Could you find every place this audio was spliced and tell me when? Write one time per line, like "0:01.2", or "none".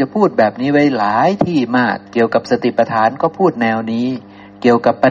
0:02.1